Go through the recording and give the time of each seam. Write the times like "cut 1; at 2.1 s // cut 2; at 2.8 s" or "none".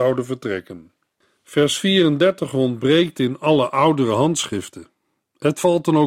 none